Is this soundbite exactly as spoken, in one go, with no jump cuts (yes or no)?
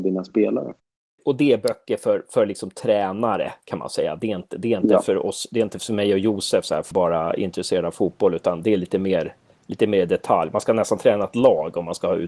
yes